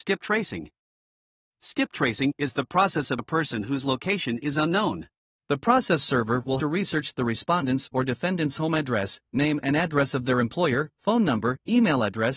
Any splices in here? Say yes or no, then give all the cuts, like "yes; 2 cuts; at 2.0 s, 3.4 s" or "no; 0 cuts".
yes; 3 cuts; at 3.2 s, 5.2 s, 6.6 s